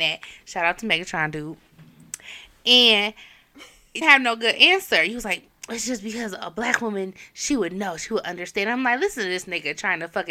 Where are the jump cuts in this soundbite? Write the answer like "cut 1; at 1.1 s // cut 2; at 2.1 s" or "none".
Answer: cut 1; at 4.0 s